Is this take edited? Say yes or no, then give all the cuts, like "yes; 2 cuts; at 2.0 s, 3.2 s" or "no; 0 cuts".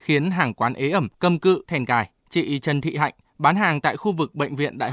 yes; 3 cuts; at 1.1 s, 1.7 s, 2.2 s